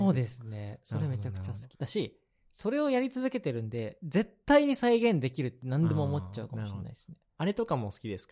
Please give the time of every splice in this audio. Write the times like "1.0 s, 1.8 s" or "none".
1.7 s